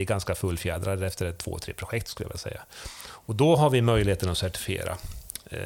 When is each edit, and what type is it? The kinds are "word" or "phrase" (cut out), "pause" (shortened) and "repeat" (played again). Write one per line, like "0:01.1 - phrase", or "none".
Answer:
none